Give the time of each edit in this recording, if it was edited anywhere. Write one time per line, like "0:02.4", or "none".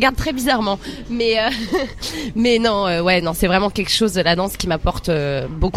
none